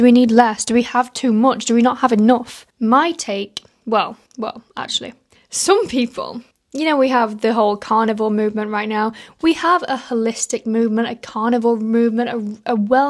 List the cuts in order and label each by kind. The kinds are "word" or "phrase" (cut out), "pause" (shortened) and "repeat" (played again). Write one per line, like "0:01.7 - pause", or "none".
0:02.7 - pause
0:04.3 - pause
0:05.4 - pause
0:06.5 - pause